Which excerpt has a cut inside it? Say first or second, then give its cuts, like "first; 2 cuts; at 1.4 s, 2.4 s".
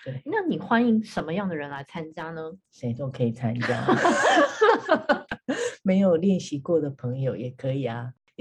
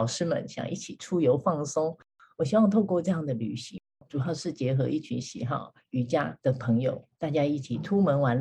first; 1 cut; at 5.3 s